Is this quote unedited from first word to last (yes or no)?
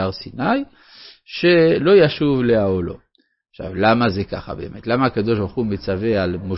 yes